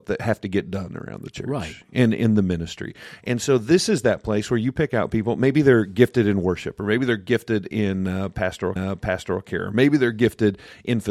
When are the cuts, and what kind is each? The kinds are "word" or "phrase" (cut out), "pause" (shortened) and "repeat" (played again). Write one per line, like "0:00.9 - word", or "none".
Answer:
0:08.8 - repeat